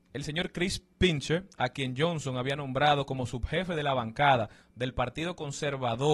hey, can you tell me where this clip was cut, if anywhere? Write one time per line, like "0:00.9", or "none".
none